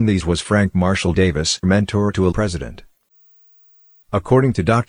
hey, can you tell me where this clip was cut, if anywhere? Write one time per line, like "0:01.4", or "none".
0:01.6
0:02.3